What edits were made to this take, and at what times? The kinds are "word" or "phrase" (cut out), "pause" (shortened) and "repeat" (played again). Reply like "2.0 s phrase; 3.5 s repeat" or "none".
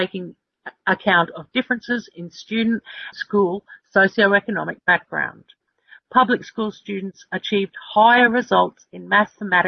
3.1 s word